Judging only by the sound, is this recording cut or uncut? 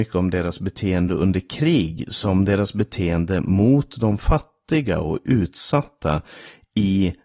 uncut